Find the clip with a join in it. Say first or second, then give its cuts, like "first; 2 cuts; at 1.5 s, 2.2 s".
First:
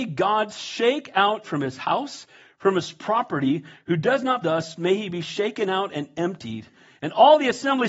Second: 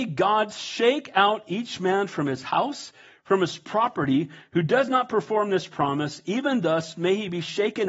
first; 2 cuts; at 1.4 s, 4.4 s